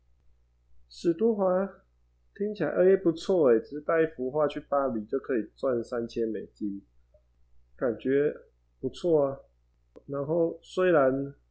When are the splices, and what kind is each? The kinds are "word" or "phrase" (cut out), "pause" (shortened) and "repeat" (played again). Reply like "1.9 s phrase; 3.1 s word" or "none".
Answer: none